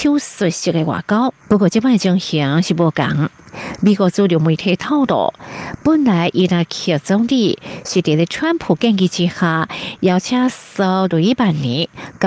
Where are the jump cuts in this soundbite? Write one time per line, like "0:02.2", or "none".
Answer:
0:01.4